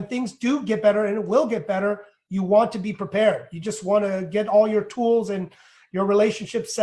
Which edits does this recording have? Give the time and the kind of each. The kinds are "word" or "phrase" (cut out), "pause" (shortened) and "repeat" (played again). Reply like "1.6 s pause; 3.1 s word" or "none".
none